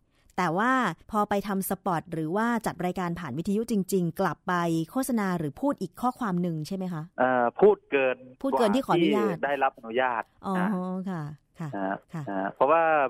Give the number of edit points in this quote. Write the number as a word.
four